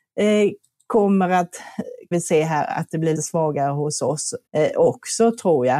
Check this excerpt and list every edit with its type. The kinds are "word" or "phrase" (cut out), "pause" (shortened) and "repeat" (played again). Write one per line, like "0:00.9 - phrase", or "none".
0:02.1 - word
0:03.2 - word
0:04.5 - pause